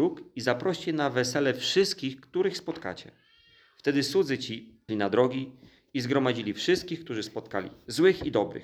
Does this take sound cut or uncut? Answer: cut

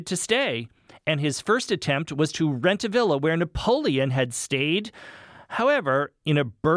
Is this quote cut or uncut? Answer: uncut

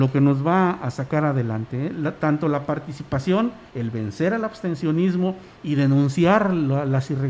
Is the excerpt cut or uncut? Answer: cut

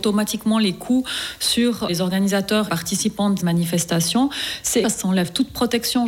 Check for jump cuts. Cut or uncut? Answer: cut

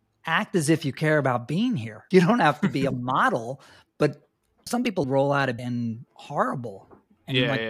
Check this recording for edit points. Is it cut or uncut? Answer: cut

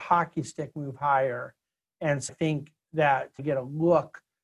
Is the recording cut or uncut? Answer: cut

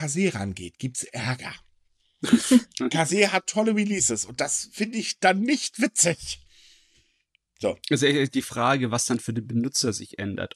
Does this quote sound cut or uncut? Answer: uncut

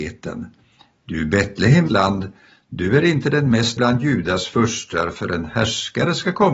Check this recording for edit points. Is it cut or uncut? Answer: cut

